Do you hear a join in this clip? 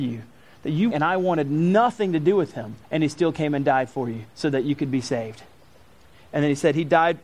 yes; 3 cuts; at 0.9 s, 2.8 s, 4.3 s

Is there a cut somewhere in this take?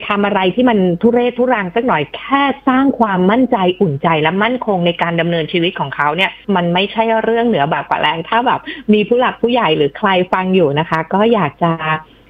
yes; 1 cut; at 6.4 s

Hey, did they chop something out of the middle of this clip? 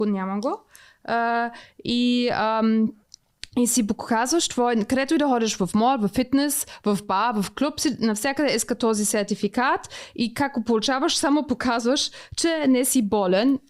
no; 0 cuts

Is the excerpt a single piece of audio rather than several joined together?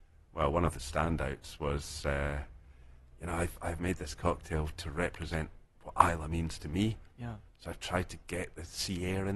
yes; 0 cuts

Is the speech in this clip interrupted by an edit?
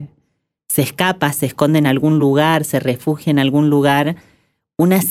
no; 0 cuts

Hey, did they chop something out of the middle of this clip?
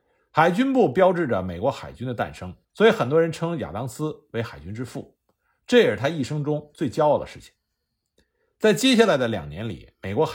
yes; 1 cut; at 2.6 s

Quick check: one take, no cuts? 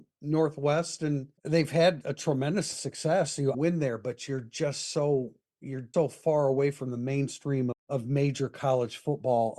no; 6 cuts; at 1.4 s, 2.0 s, 2.7 s, 3.5 s, 5.9 s, 7.7 s

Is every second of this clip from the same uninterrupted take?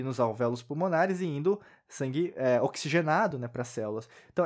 yes; 0 cuts

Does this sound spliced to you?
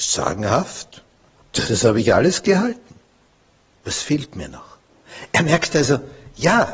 yes; 1 cut; at 1.6 s

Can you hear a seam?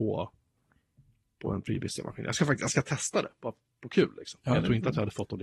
no; 0 cuts

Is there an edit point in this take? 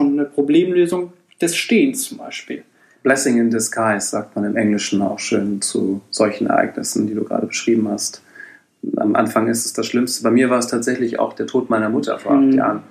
no; 0 cuts

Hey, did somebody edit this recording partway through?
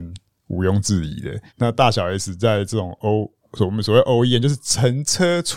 yes; 1 cut; at 1.5 s

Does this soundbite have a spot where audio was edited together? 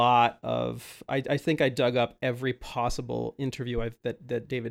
no; 0 cuts

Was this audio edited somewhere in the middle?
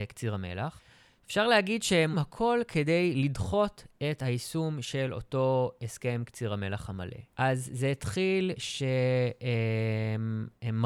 yes; 3 cuts; at 2.1 s, 7.3 s, 8.6 s

